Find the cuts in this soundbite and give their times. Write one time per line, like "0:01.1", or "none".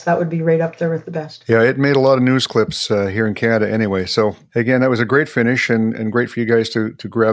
none